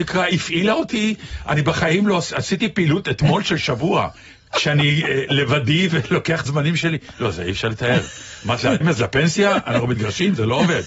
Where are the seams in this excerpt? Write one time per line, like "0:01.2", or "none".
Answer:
0:04.2
0:06.5
0:08.8